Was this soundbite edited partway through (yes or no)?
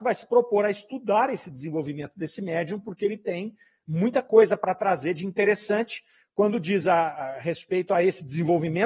no